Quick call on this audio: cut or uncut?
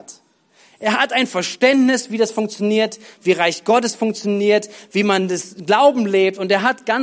uncut